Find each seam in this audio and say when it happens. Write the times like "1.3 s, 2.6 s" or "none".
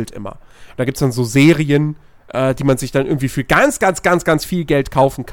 none